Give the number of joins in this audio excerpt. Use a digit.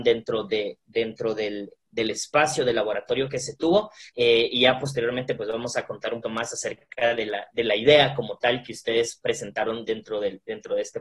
3